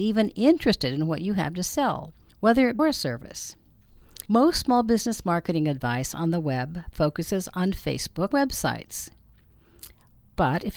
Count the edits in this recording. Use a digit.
4